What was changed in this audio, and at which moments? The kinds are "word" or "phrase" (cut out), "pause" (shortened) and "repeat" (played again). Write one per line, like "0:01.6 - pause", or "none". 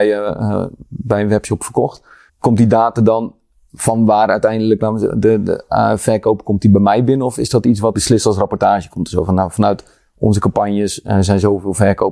0:02.3 - pause
0:07.9 - phrase

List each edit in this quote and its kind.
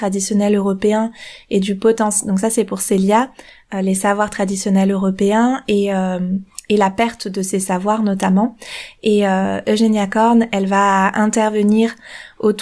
none

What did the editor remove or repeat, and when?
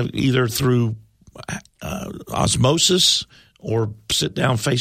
none

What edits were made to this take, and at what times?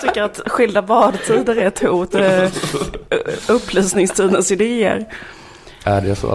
0:02.1 - word

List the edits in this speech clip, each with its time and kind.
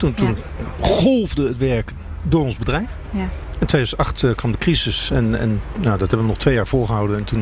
none

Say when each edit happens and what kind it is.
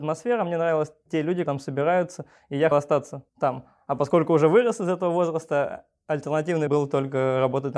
0:01.5 - word
0:02.7 - word
0:03.3 - pause
0:06.7 - word

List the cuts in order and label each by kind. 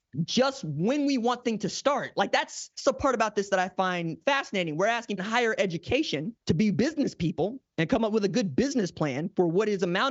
0:01.4 - word
0:02.7 - pause
0:05.2 - phrase
0:06.4 - pause

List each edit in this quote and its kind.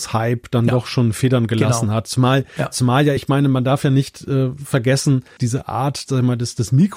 0:03.2 - word
0:05.4 - word
0:06.1 - word

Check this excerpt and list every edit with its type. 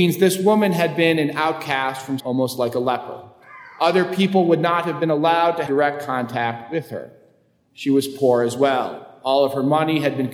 0:02.2 - word
0:05.7 - word

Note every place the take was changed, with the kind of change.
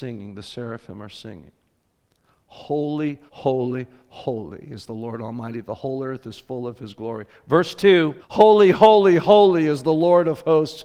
0:03.3 - pause
0:08.2 - pause

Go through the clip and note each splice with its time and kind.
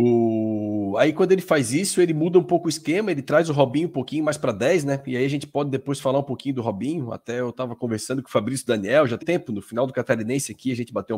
0:09.2 - word

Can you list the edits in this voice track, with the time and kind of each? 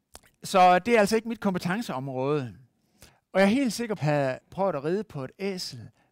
0:03.1 - pause
0:04.0 - phrase
0:04.4 - pause

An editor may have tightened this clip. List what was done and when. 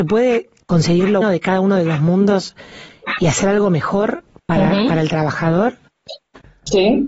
0:01.2 - word

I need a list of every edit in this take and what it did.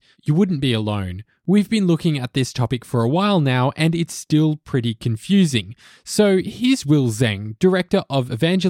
none

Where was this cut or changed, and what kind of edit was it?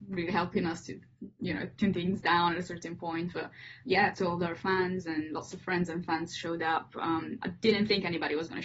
0:03.8 - word
0:04.1 - phrase

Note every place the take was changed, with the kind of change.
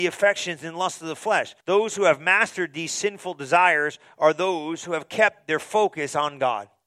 0:01.6 - pause

